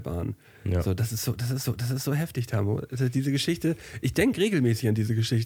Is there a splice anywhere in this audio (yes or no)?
yes